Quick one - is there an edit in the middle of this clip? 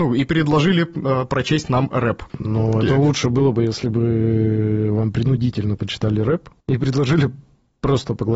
yes; 2 cuts; at 2.3 s, 6.6 s

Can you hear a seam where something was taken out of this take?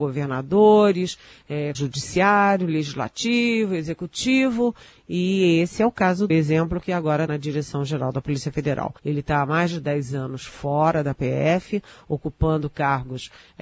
yes; 4 cuts; at 1.7 s, 6.3 s, 7.3 s, 9.0 s

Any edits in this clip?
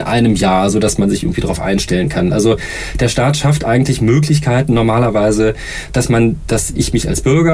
no; 0 cuts

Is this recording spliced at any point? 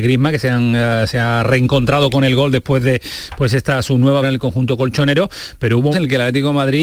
yes; 2 cuts; at 4.2 s, 5.9 s

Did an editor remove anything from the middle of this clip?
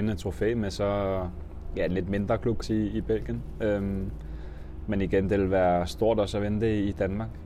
yes; 1 cut; at 2.6 s

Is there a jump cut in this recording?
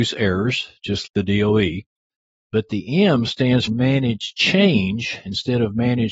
yes; 2 cuts; at 1.1 s, 3.7 s

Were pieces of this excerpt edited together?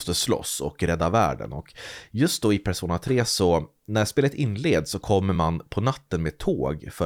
no; 0 cuts

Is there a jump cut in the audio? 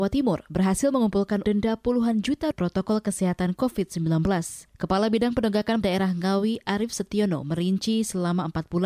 yes; 4 cuts; at 1.4 s, 2.5 s, 4.7 s, 5.8 s

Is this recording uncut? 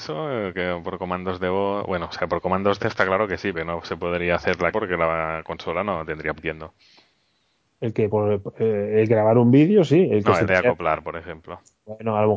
no; 7 cuts; at 2.1 s, 2.8 s, 3.5 s, 4.7 s, 6.4 s, 8.1 s, 10.5 s

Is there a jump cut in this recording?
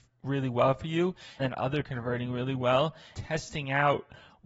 yes; 3 cuts; at 1.4 s, 1.8 s, 3.1 s

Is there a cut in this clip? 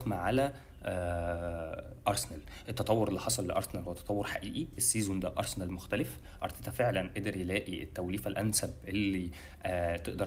no; 0 cuts

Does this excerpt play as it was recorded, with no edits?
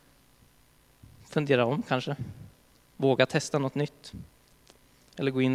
yes; 0 cuts

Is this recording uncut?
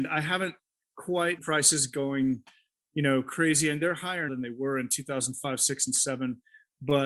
no; 2 cuts; at 1.4 s, 4.3 s

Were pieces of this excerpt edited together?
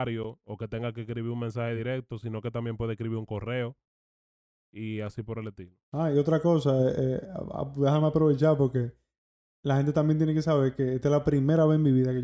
no; 0 cuts

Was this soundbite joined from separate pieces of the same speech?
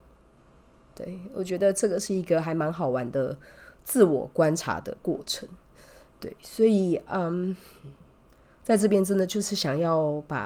no; 0 cuts

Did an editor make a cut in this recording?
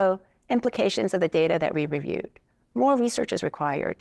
no; 0 cuts

